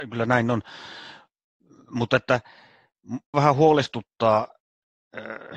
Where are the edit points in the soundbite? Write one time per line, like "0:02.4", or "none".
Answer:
0:03.3